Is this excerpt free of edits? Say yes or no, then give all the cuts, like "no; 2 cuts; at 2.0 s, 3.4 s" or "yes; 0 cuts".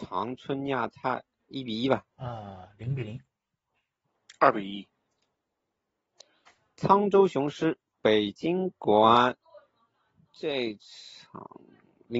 no; 2 cuts; at 1.4 s, 2.1 s